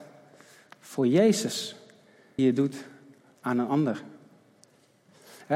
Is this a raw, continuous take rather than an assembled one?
no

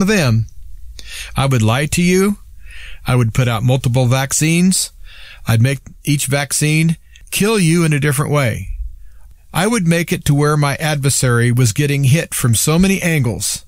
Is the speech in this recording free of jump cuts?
yes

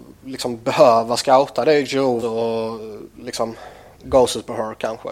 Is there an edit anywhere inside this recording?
yes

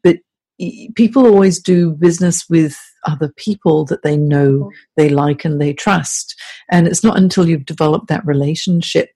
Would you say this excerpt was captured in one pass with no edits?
yes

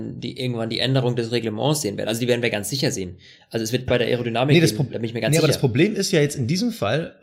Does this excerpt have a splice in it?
yes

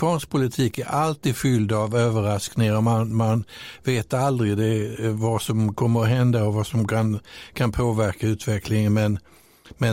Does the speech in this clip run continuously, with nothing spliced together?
yes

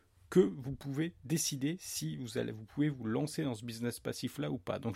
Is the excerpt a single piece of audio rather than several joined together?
yes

